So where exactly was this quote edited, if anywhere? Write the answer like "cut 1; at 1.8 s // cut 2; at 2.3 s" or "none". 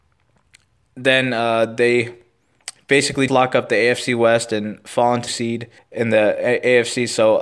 cut 1; at 3.3 s // cut 2; at 5.3 s // cut 3; at 5.8 s